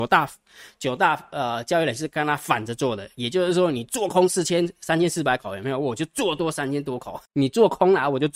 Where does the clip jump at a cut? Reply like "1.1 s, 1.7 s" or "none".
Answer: 7.3 s